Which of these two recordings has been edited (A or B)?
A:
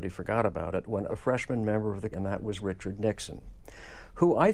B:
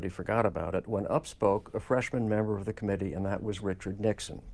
A